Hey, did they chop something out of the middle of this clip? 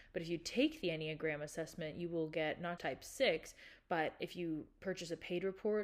yes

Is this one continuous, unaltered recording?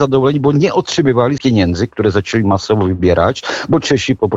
no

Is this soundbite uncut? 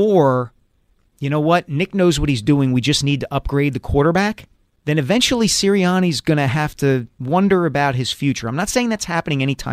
no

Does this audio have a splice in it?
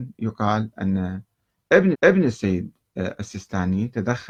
yes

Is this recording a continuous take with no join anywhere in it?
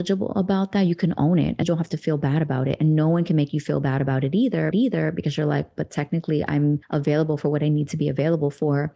no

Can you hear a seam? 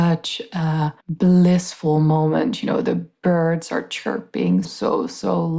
yes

